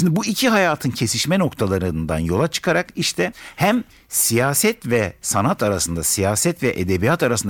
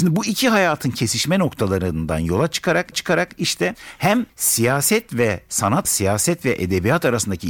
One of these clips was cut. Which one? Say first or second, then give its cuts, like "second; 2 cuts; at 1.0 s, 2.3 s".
second; 3 cuts; at 2.9 s, 4.3 s, 5.8 s